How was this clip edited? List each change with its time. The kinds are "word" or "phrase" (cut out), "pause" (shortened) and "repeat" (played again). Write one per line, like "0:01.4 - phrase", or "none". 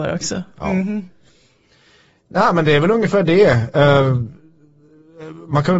none

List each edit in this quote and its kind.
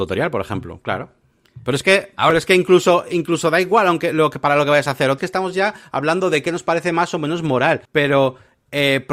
0:05.2 - phrase
0:07.8 - pause

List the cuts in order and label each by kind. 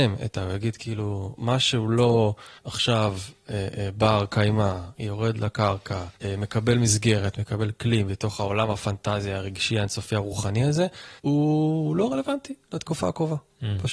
0:02.6 - pause
0:06.2 - pause
0:11.2 - pause

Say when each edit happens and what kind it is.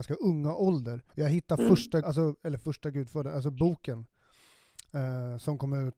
0:01.1 - pause
0:02.0 - word

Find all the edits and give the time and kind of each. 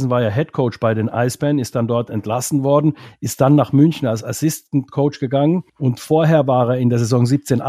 0:05.7 - pause

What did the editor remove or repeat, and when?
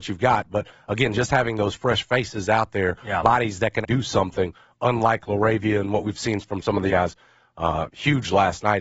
0:03.8 - word
0:06.9 - word

